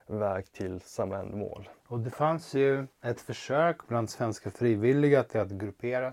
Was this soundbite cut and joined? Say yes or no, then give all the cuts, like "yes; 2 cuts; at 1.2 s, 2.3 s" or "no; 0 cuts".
yes; 2 cuts; at 1.8 s, 2.9 s